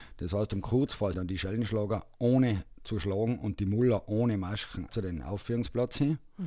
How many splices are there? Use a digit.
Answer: 2